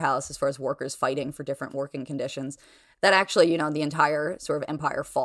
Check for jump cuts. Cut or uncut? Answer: uncut